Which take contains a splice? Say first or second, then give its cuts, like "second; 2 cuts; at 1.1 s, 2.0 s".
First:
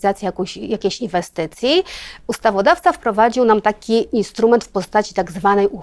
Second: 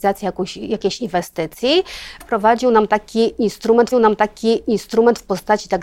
second; 2 cuts; at 2.2 s, 3.9 s